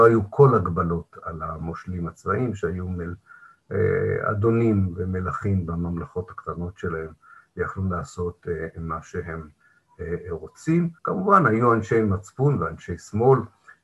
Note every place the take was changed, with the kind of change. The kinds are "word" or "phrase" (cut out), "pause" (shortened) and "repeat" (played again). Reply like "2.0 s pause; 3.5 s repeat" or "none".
11.0 s pause